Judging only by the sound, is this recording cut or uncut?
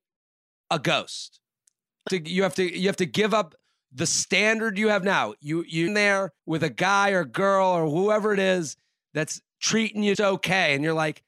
cut